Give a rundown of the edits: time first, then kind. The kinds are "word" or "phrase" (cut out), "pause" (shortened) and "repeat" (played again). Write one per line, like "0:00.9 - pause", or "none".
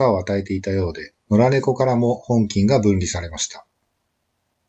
0:01.2 - pause